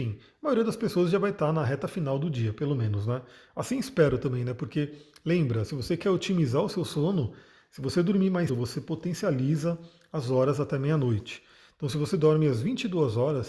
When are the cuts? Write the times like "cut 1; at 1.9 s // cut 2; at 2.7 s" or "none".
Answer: cut 1; at 8.5 s